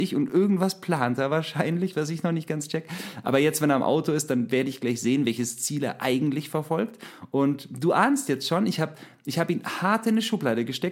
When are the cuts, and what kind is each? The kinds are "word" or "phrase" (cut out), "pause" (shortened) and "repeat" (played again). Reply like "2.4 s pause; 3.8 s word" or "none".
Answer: none